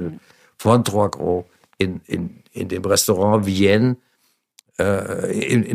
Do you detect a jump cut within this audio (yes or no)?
no